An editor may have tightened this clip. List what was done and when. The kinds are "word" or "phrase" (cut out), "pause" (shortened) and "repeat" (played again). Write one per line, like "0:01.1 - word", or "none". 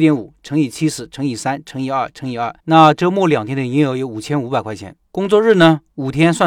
0:02.6 - pause
0:05.0 - pause